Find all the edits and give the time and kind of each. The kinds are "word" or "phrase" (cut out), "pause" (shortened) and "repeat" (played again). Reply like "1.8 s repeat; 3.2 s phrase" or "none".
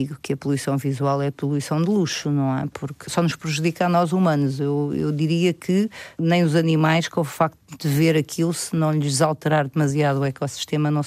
none